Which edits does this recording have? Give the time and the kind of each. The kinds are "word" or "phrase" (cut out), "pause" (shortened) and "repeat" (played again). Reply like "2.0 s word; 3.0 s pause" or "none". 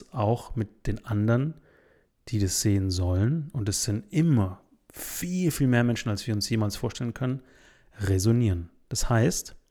none